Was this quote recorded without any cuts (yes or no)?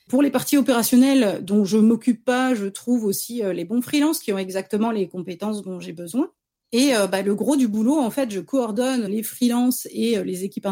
no